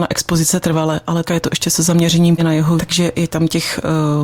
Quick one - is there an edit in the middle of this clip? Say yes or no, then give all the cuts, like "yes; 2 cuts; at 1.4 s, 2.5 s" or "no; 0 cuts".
yes; 3 cuts; at 1.3 s, 2.4 s, 2.8 s